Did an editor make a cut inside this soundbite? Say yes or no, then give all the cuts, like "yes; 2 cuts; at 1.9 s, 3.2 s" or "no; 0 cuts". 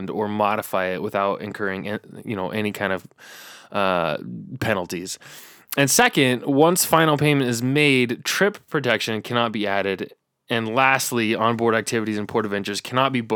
no; 0 cuts